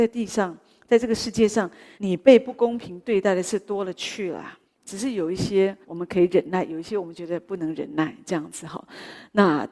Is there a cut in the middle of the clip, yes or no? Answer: yes